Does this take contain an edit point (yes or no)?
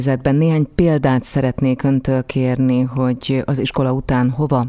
no